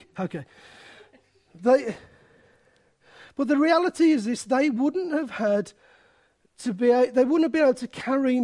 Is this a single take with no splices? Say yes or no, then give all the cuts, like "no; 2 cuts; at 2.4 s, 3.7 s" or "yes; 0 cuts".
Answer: yes; 0 cuts